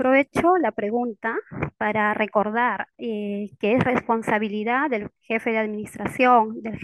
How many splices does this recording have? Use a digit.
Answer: 1